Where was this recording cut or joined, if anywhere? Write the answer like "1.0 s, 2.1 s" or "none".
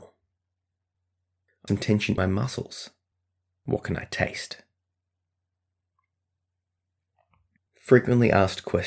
1.7 s, 2.2 s